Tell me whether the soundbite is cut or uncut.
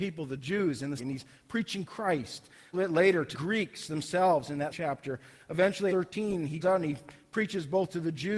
cut